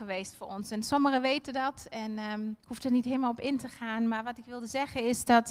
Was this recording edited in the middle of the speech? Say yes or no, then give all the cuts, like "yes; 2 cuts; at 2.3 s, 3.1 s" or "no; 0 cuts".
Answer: yes; 1 cut; at 2.6 s